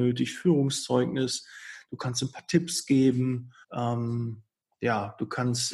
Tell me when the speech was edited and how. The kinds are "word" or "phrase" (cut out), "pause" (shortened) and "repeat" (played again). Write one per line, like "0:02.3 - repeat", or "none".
0:03.6 - pause